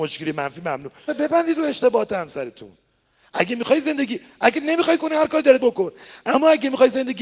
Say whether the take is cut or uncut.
cut